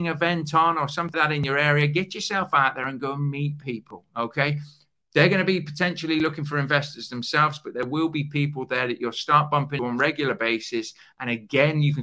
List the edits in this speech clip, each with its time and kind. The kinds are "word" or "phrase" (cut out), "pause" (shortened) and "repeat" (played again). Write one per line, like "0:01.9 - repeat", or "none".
0:01.1 - word
0:09.8 - word